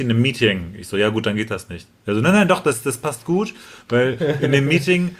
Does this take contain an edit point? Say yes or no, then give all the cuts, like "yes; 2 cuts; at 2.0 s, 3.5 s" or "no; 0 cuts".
no; 0 cuts